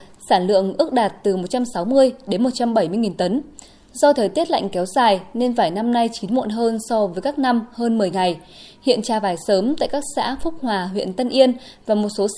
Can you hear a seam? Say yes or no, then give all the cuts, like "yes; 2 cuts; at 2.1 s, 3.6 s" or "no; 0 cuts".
no; 0 cuts